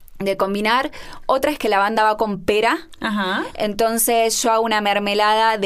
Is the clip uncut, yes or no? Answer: yes